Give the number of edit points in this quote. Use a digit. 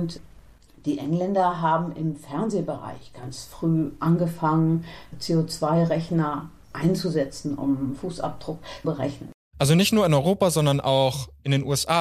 1